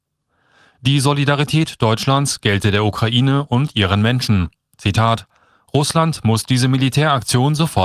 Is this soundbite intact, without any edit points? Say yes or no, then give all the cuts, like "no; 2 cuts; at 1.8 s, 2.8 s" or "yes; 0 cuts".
yes; 0 cuts